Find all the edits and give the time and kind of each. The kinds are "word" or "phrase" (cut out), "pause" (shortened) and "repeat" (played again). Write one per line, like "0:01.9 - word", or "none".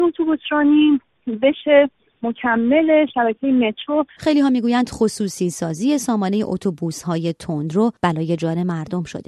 0:08.0 - pause